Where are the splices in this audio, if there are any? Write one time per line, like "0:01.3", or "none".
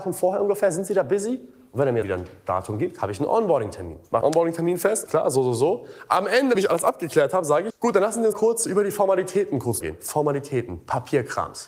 0:02.0
0:04.2
0:05.1
0:06.5
0:07.7
0:08.3
0:09.8